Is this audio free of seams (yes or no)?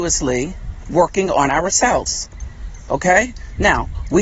yes